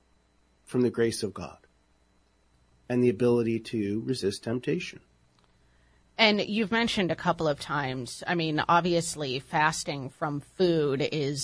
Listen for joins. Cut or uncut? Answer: uncut